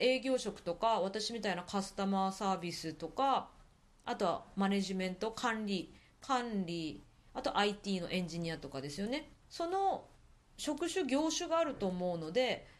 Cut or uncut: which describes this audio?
cut